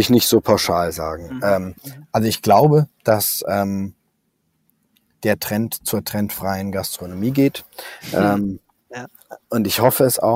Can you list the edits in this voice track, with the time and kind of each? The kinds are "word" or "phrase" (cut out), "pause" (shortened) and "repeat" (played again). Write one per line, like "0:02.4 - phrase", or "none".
none